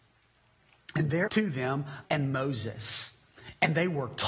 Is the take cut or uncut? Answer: cut